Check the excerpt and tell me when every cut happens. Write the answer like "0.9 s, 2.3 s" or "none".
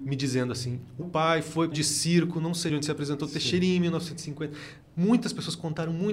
1.0 s, 1.7 s, 2.7 s

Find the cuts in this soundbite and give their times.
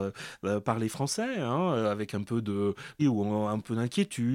3.0 s

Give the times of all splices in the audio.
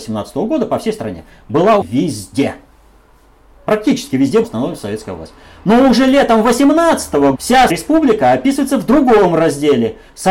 1.8 s, 4.4 s, 7.3 s, 7.7 s

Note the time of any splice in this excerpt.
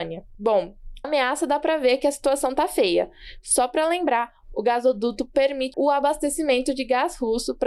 1.0 s, 5.7 s

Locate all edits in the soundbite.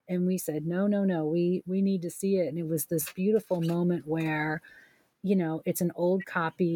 none

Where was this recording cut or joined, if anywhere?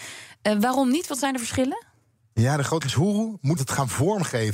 2.8 s, 3.6 s

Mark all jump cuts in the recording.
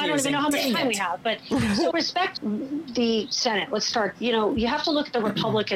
1.9 s, 2.4 s, 4.1 s

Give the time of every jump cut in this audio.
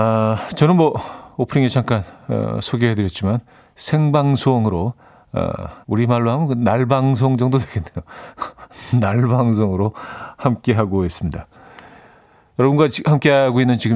5.8 s

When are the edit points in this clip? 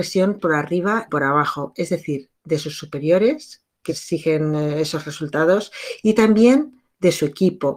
1.1 s, 3.9 s

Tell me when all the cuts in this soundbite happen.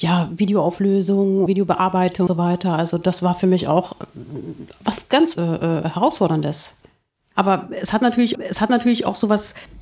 1.5 s, 2.3 s, 5.3 s, 8.3 s

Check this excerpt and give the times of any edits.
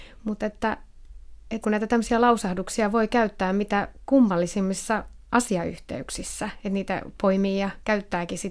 1.6 s

